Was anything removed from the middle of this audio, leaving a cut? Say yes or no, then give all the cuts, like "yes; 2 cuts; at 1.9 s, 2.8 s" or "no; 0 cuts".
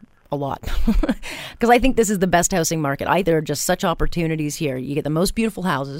yes; 1 cut; at 3.2 s